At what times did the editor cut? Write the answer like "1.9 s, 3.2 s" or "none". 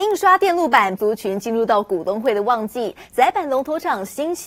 1.0 s